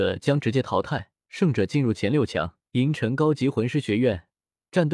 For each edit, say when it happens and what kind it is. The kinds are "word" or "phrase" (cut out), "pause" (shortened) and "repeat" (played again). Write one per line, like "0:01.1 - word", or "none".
0:01.2 - pause
0:02.7 - pause

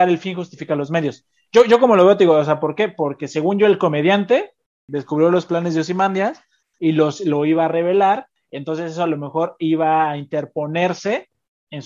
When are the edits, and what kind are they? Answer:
none

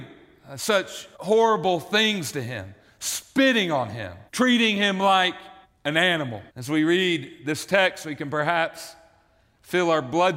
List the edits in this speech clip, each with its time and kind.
0:01.1 - pause
0:04.3 - pause
0:05.6 - pause
0:06.5 - pause

